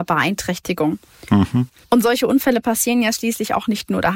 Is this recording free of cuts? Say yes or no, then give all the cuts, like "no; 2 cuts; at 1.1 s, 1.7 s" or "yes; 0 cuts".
yes; 0 cuts